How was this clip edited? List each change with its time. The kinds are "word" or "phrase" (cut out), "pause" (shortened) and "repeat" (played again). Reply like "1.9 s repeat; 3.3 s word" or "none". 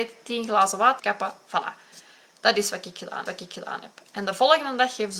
1.0 s word; 3.3 s repeat